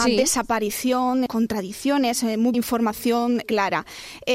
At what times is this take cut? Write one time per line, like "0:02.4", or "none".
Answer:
0:01.3
0:02.5
0:03.4